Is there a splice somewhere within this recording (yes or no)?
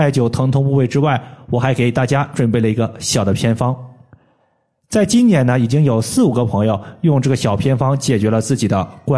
no